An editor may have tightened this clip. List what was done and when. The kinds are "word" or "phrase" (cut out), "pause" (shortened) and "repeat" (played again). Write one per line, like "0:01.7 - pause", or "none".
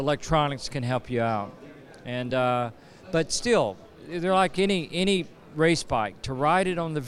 none